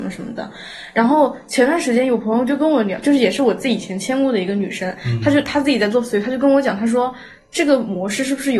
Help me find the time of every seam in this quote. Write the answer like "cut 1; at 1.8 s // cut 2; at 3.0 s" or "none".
none